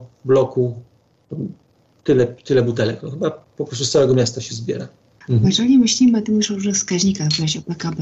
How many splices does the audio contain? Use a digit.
0